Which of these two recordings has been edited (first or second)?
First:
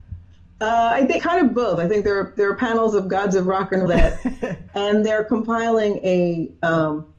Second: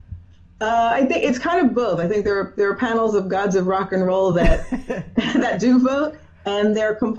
first